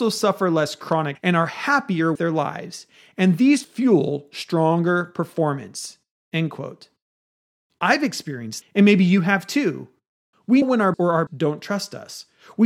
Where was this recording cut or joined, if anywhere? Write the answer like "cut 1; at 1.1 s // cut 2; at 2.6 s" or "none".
cut 1; at 1.1 s // cut 2; at 2.2 s // cut 3; at 3.6 s // cut 4; at 8.6 s // cut 5; at 10.6 s // cut 6; at 10.9 s // cut 7; at 11.3 s